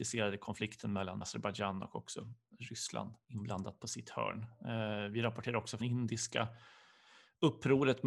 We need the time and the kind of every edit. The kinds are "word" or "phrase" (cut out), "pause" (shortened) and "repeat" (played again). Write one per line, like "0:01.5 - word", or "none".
0:01.2 - word
0:03.2 - pause
0:05.8 - word